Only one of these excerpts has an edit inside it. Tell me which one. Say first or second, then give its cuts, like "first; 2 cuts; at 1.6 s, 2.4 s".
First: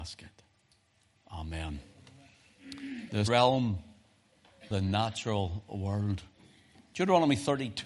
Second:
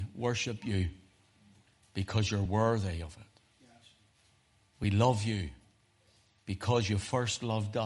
first; 2 cuts; at 3.3 s, 4.7 s